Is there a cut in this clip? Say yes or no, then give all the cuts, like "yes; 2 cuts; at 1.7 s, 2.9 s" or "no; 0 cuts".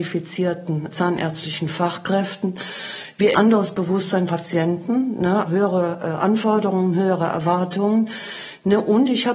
yes; 4 cuts; at 0.9 s, 3.3 s, 4.3 s, 5.5 s